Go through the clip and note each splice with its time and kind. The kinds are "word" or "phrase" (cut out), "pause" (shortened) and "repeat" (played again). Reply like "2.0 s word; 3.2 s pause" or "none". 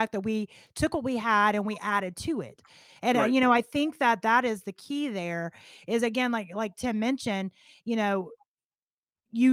none